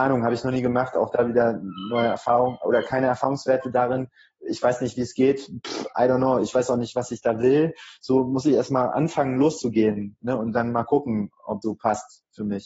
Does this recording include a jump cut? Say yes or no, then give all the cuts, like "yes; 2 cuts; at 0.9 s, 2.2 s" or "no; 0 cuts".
yes; 1 cut; at 11.6 s